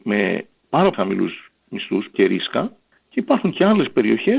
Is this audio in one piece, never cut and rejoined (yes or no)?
no